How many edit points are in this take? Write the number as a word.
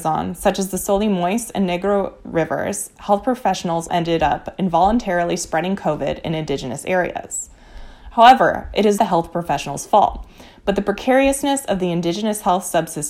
two